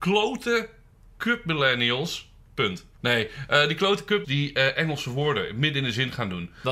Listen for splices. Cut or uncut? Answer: cut